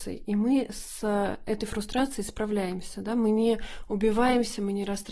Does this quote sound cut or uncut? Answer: uncut